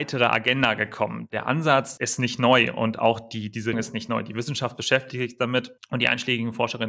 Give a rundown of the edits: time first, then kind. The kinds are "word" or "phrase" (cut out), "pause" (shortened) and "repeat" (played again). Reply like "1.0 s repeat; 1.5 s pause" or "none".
2.0 s word; 3.7 s word